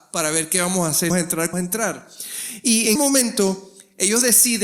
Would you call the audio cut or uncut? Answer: cut